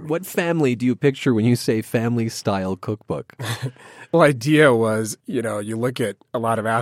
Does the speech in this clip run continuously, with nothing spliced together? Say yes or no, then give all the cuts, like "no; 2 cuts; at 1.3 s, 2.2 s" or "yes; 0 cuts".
no; 2 cuts; at 4.1 s, 5.2 s